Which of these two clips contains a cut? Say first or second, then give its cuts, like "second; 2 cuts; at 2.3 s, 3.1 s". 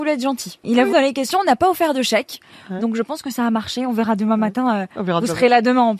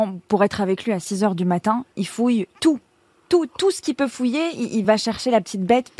first; 1 cut; at 0.9 s